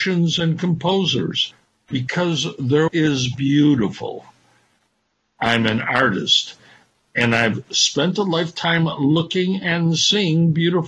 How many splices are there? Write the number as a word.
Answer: one